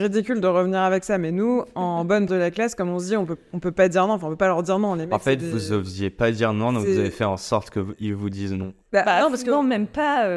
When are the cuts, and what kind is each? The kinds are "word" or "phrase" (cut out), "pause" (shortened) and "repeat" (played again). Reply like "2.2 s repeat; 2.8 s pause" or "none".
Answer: 2.3 s word; 8.8 s pause